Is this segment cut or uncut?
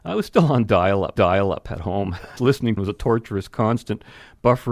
cut